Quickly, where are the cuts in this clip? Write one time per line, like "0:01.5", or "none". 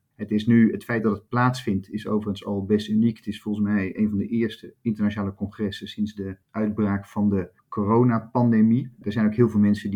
0:06.4